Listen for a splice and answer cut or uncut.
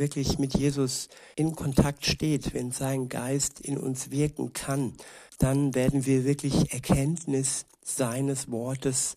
cut